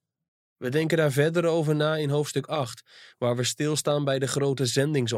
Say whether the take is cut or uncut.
uncut